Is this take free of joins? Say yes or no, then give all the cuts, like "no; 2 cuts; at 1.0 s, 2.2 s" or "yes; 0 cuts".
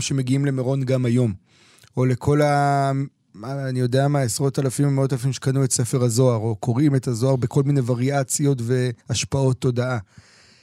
no; 1 cut; at 9.0 s